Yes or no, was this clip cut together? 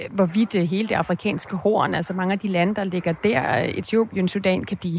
no